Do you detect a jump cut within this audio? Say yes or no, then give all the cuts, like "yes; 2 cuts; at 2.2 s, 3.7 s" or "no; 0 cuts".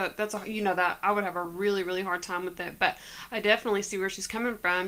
no; 0 cuts